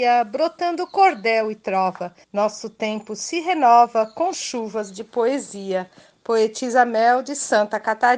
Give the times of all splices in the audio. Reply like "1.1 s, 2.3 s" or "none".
2.2 s